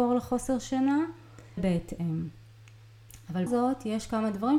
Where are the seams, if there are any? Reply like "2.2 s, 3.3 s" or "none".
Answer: 1.6 s, 3.5 s